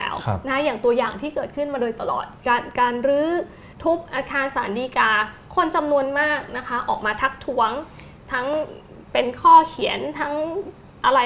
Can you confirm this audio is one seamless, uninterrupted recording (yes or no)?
no